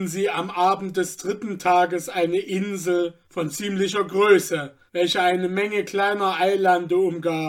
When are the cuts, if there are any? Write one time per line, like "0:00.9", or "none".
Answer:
0:03.2
0:04.9